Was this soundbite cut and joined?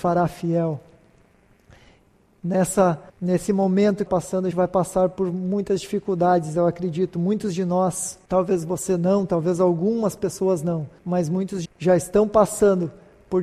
yes; 6 cuts; at 3.1 s, 4.1 s, 4.5 s, 8.2 s, 11.0 s, 11.6 s

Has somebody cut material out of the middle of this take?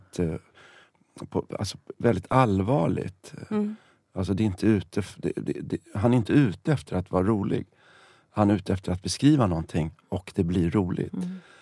no; 0 cuts

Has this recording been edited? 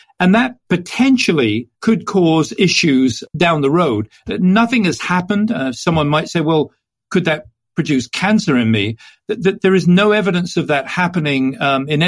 yes; 1 cut; at 1.8 s

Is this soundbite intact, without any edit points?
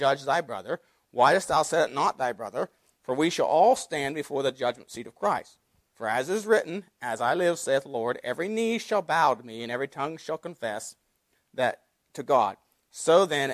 yes; 0 cuts

